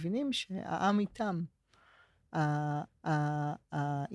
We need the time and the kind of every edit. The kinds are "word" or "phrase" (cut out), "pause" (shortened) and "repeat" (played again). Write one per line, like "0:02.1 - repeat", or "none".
0:02.9 - repeat